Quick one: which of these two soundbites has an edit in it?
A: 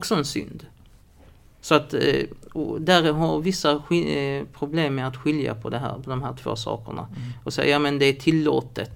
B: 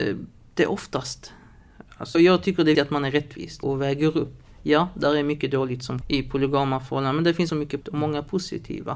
B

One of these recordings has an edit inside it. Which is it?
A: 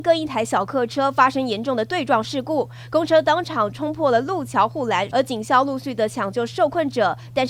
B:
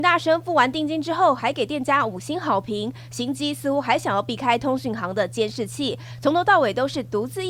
A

